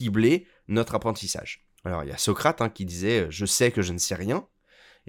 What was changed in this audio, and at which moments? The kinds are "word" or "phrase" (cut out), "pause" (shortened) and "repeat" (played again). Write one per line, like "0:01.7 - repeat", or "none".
0:01.8 - pause

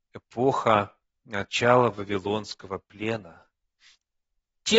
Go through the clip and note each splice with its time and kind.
0:01.0 - pause

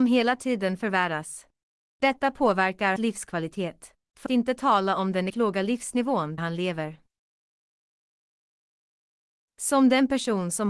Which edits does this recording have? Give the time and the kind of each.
0:03.0 - word
0:04.3 - word
0:05.3 - word
0:06.4 - word

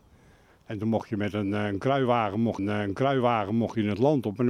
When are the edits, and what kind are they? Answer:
0:02.6 - repeat

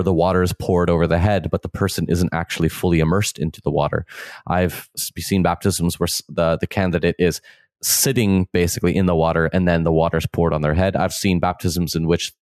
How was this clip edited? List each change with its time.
none

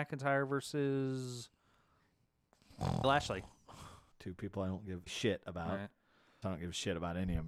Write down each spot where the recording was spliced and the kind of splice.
0:03.0 - word
0:04.1 - pause
0:05.1 - word
0:06.4 - word

